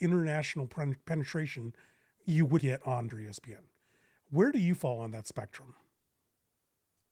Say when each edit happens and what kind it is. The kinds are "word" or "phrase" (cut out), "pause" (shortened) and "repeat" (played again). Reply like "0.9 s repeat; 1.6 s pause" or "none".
2.2 s word; 2.6 s word; 3.1 s word